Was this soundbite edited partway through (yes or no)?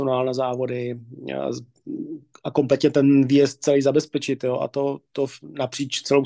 no